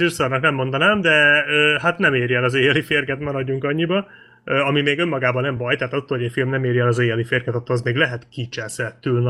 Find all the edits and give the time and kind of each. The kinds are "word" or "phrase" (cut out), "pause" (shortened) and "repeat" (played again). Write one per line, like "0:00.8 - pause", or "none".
none